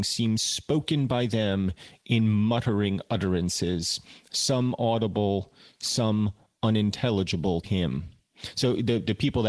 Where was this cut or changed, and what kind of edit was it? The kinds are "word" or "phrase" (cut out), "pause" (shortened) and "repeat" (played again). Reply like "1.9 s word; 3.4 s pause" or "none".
7.6 s word